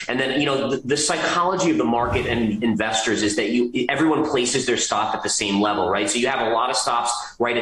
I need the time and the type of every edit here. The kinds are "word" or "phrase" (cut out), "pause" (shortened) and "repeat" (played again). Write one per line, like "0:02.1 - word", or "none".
none